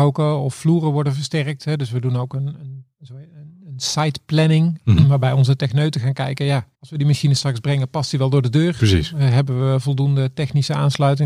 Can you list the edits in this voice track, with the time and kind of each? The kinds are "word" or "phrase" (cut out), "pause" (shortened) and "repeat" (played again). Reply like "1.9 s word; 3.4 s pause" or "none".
6.7 s pause